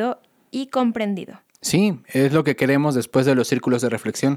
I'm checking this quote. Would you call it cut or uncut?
uncut